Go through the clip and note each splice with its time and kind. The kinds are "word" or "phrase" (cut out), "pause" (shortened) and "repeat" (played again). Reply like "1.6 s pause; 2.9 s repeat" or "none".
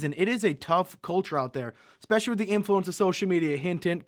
none